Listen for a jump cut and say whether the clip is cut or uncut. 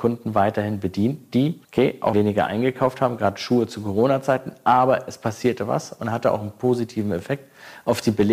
cut